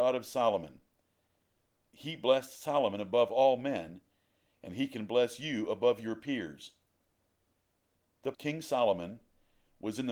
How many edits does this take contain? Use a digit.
1